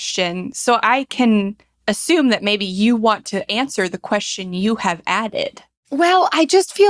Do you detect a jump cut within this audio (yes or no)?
no